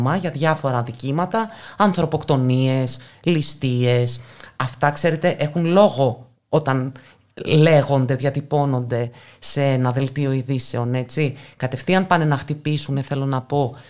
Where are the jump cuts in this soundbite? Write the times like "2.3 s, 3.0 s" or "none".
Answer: none